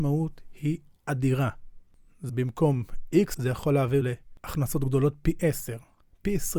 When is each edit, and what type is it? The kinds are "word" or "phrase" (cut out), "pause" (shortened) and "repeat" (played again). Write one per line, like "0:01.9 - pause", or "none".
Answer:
0:02.3 - word
0:03.3 - word
0:04.0 - word